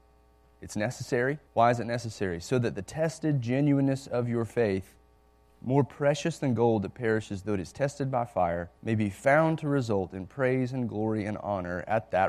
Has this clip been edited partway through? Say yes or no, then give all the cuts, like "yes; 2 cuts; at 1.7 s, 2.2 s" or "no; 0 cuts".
yes; 3 cuts; at 1.5 s, 5.2 s, 8.8 s